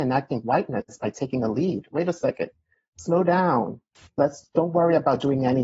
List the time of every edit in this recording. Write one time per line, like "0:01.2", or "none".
none